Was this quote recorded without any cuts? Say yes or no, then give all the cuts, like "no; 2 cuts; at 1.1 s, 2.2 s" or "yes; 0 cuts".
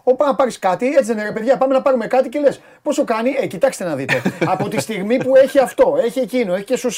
yes; 0 cuts